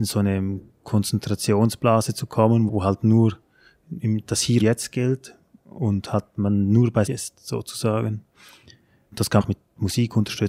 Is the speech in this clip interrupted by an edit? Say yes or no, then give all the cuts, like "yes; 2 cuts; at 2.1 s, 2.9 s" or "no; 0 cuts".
yes; 4 cuts; at 2.7 s, 4.6 s, 7.1 s, 9.4 s